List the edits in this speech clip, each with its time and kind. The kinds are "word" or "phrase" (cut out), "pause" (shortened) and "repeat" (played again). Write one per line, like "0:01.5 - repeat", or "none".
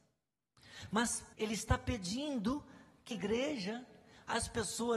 0:01.3 - word
0:03.1 - word

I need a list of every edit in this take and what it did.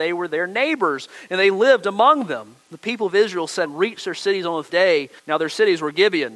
0:02.6 - pause
0:03.6 - word
0:04.7 - word
0:05.2 - pause

